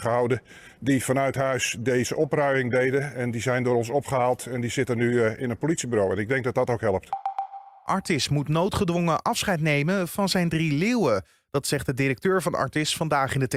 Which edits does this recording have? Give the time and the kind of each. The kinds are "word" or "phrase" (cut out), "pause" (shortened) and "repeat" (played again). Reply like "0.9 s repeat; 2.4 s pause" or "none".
none